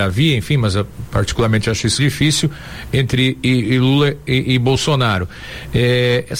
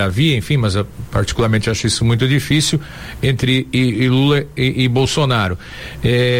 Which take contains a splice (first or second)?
first